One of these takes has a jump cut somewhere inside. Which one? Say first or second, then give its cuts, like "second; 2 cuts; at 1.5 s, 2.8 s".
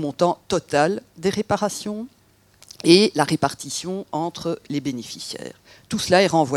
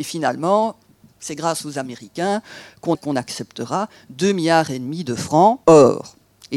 second; 2 cuts; at 2.9 s, 5.6 s